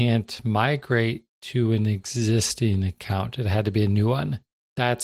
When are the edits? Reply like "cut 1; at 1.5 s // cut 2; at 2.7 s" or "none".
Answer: none